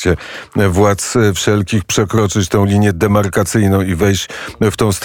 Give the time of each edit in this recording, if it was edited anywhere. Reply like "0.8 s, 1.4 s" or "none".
none